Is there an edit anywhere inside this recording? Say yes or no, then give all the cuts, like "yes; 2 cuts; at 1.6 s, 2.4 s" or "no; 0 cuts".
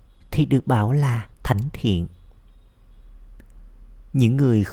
yes; 1 cut; at 1.3 s